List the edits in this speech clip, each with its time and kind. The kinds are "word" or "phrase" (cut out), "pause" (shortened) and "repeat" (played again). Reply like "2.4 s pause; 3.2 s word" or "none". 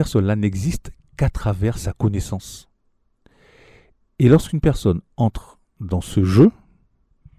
none